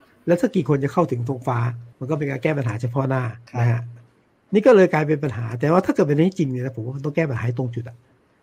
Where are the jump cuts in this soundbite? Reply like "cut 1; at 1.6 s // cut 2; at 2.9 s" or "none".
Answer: cut 1; at 1.9 s // cut 2; at 3.5 s